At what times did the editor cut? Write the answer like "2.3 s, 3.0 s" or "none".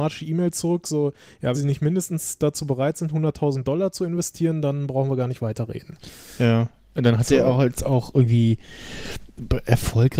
1.5 s